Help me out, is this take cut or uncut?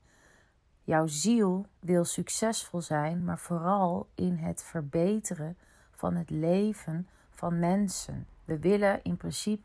uncut